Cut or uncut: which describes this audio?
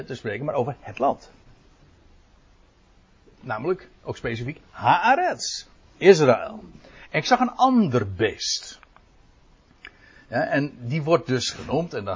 uncut